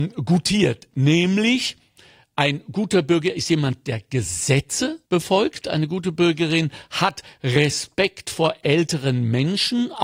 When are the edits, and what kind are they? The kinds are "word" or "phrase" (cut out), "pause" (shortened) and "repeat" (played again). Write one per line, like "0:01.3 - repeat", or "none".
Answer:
0:05.0 - pause